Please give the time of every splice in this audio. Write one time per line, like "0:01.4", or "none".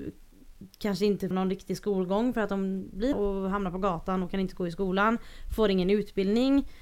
0:01.3
0:03.1